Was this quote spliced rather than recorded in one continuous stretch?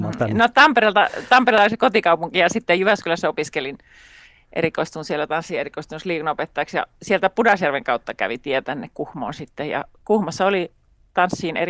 no; 0 cuts

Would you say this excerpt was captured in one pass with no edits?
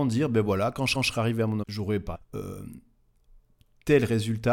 no; 3 cuts; at 0.9 s, 1.6 s, 2.1 s

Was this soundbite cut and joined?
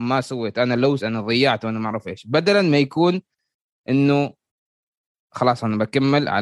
yes; 1 cut; at 1.0 s

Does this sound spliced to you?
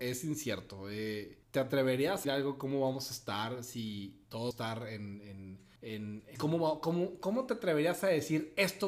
yes; 5 cuts; at 1.4 s, 2.2 s, 4.5 s, 5.8 s, 6.3 s

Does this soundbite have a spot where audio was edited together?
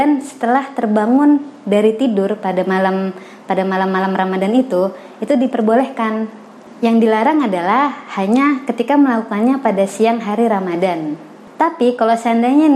no; 0 cuts

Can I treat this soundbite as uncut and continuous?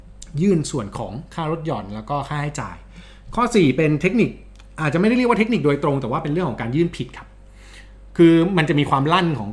yes; 0 cuts

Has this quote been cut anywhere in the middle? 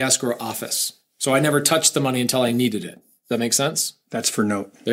no; 0 cuts

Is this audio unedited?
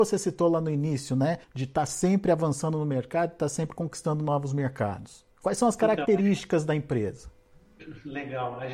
no; 2 cuts; at 1.4 s, 5.3 s

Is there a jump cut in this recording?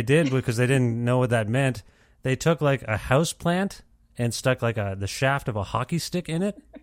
no; 0 cuts

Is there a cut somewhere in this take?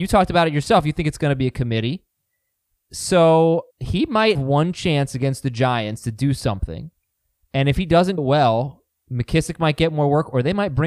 yes; 3 cuts; at 3.7 s, 4.3 s, 8.2 s

